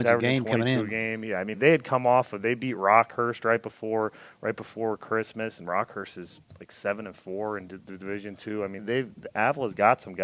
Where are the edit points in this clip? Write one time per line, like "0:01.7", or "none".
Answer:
0:01.5
0:08.8